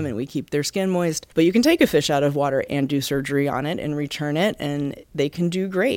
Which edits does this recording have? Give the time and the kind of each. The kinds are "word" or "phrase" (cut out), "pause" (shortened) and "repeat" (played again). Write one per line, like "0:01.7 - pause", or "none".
0:01.3 - pause